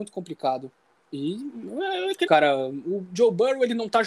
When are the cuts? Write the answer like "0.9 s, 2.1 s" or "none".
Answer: 2.3 s